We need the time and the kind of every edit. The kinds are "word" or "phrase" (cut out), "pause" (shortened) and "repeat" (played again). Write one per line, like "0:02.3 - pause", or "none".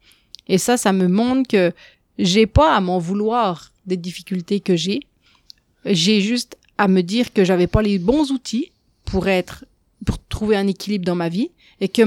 none